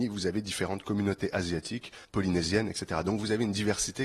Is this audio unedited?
no; 1 cut; at 2.0 s

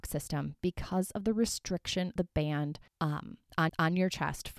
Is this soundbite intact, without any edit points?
no; 3 cuts; at 2.2 s, 2.9 s, 3.7 s

